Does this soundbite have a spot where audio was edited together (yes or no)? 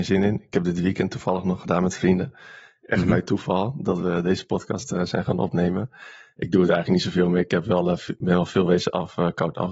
no